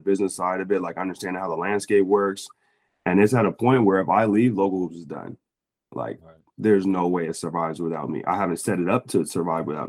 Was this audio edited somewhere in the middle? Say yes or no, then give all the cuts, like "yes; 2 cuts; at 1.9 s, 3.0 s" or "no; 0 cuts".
no; 0 cuts